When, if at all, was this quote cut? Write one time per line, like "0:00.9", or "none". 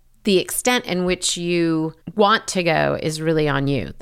none